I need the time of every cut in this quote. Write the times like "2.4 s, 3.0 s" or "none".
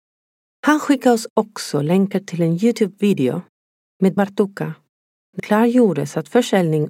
4.2 s, 5.4 s